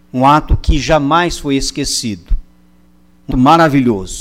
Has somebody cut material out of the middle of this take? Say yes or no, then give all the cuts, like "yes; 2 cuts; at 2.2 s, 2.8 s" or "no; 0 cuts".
yes; 1 cut; at 3.3 s